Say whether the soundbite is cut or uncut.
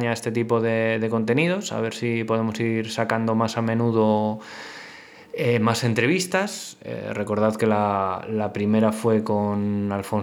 uncut